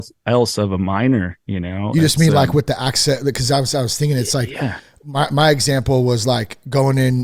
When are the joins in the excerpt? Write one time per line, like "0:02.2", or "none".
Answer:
none